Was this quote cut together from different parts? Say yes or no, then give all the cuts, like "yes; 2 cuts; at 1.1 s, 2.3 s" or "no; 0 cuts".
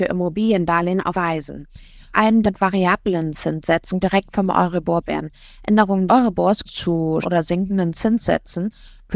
yes; 8 cuts; at 1.1 s, 2.1 s, 2.4 s, 4.0 s, 5.0 s, 6.1 s, 6.7 s, 7.2 s